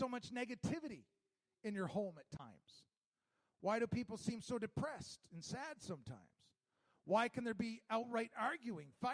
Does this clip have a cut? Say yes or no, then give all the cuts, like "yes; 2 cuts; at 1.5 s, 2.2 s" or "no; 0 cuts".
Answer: no; 0 cuts